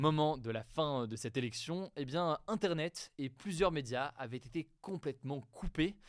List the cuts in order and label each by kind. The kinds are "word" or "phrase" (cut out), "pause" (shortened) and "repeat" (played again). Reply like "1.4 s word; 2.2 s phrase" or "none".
none

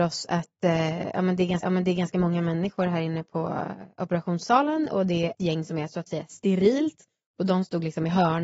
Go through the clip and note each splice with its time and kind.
1.6 s repeat; 5.3 s word

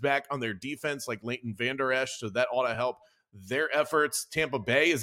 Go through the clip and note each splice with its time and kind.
none

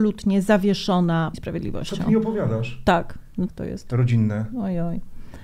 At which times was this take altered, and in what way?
1.3 s word; 3.5 s phrase

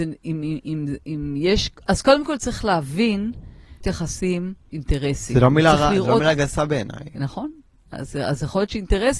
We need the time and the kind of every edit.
3.8 s word; 4.7 s word

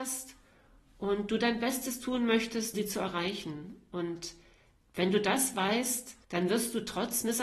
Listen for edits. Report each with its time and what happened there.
2.7 s word; 6.2 s pause

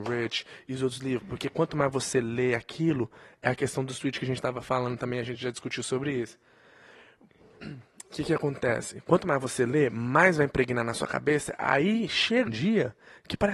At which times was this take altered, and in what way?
12.5 s word

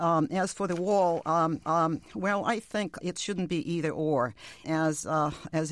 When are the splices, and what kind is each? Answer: 1.6 s repeat; 3.0 s word; 4.6 s word

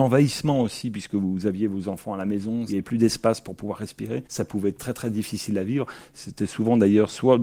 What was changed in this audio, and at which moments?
4.3 s pause

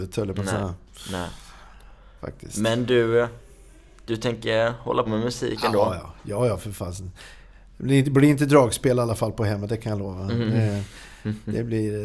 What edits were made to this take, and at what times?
5.1 s word

